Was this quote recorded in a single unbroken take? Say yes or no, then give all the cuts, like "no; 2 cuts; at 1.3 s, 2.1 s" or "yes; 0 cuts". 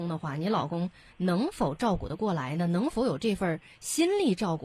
yes; 0 cuts